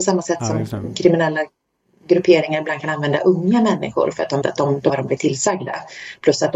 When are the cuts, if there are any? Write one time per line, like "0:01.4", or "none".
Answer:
0:04.4
0:04.9